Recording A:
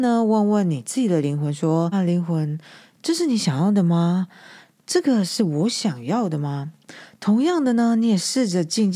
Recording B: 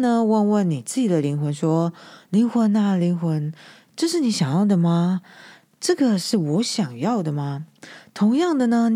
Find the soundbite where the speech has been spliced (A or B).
A